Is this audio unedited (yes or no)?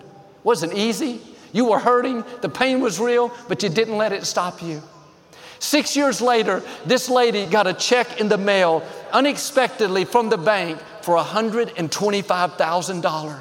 yes